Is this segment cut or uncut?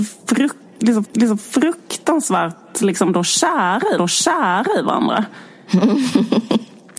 cut